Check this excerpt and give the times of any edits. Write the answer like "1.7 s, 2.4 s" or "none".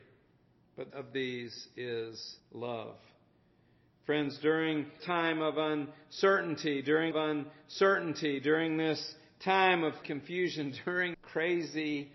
0.9 s, 2.4 s, 5.0 s, 7.1 s, 10.0 s, 11.1 s

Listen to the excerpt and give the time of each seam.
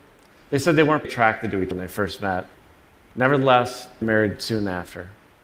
1.0 s, 1.7 s, 4.0 s

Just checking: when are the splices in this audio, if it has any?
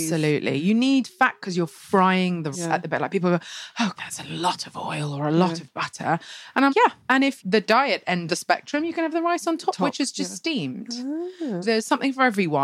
2.5 s, 4.0 s, 6.7 s, 7.4 s, 8.3 s, 11.6 s

